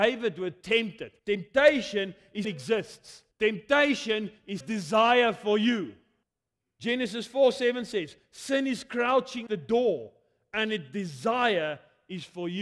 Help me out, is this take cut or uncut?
cut